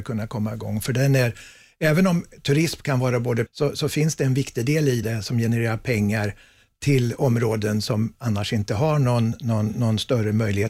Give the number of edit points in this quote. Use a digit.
2